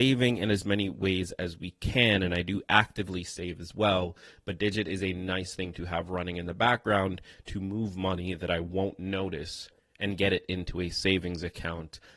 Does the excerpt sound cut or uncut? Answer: uncut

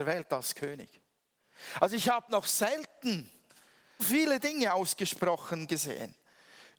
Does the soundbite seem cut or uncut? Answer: cut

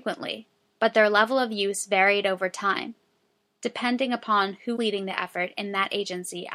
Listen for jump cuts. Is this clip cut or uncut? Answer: cut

